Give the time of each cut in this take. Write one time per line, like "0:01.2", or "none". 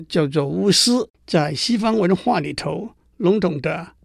0:01.1